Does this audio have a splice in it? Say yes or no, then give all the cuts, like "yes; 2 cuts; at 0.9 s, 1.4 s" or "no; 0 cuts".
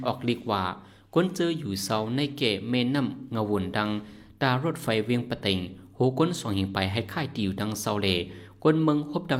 no; 0 cuts